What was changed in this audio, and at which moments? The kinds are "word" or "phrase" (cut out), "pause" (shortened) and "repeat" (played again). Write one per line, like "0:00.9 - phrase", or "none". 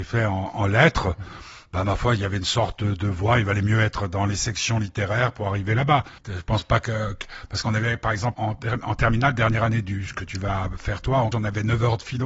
0:06.2 - pause
0:08.3 - word
0:11.3 - word